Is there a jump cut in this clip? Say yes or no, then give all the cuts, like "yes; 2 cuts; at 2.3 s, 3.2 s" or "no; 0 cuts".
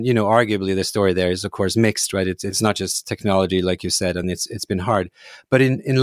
no; 0 cuts